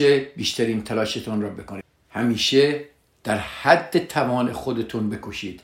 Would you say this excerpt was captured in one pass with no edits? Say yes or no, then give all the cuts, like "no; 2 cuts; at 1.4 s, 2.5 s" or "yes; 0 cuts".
yes; 0 cuts